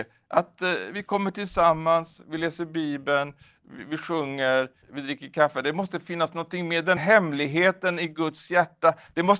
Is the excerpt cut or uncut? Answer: cut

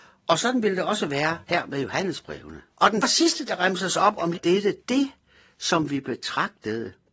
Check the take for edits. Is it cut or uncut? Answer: cut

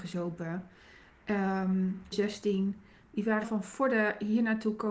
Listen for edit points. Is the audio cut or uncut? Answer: cut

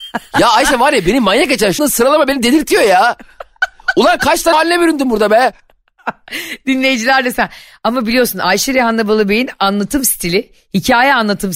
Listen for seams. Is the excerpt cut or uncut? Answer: cut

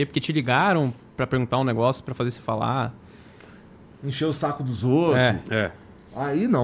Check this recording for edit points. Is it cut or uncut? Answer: uncut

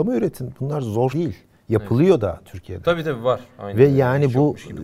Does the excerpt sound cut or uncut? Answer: cut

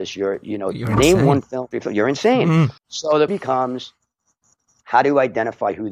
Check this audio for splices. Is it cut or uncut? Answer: cut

